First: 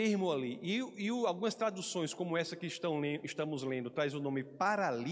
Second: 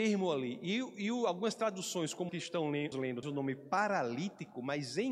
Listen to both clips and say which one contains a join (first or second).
second